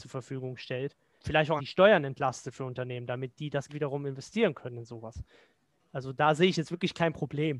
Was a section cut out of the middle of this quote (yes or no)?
yes